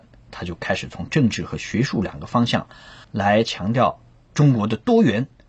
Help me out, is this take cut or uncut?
cut